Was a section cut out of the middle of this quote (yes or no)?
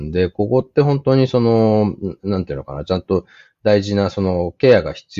no